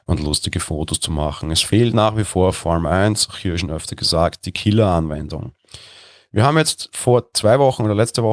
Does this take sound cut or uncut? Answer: uncut